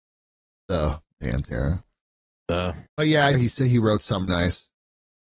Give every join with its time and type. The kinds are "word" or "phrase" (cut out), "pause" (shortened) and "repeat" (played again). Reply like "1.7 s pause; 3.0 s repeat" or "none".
2.9 s pause; 3.3 s word; 4.3 s word